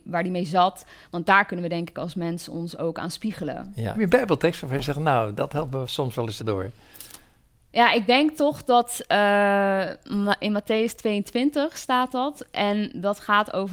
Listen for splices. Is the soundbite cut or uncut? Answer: cut